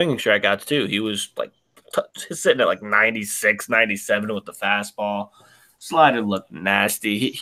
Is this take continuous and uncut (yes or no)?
yes